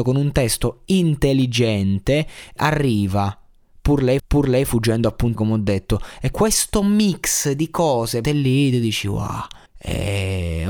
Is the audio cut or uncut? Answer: cut